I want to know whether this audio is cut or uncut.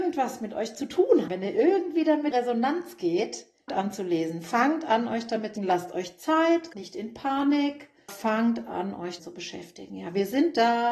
cut